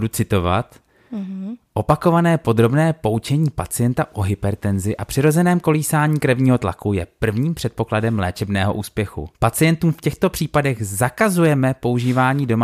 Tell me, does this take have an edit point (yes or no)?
yes